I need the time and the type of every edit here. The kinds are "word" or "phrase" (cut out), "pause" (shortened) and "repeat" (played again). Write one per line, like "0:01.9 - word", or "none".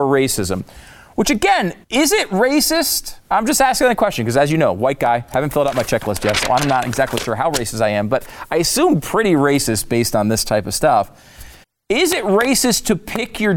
0:01.8 - pause
0:11.6 - pause